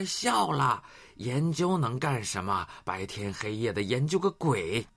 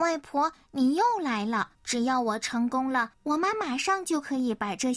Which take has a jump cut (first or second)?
second